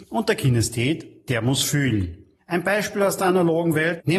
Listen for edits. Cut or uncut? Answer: uncut